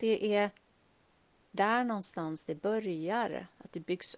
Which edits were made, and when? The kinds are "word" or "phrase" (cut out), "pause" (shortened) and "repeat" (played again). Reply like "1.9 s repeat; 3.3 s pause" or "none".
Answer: none